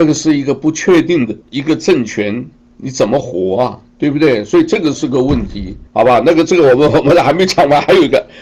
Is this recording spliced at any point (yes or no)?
yes